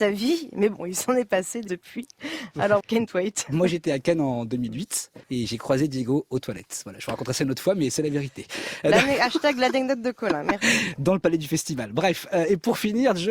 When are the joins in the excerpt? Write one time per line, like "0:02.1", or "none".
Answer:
0:01.7
0:02.8
0:05.2